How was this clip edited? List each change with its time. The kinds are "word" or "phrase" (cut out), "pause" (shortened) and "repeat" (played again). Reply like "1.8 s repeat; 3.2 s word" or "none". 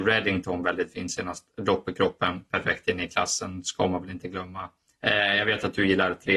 none